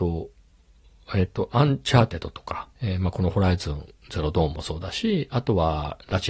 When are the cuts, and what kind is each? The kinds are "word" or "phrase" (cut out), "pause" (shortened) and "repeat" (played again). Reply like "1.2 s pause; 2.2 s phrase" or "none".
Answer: 2.8 s pause